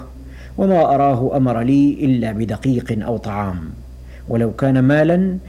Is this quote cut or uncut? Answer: uncut